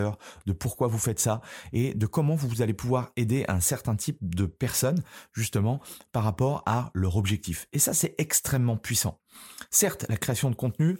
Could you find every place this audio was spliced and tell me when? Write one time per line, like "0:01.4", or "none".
none